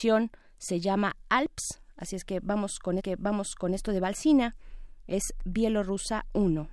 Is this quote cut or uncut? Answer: cut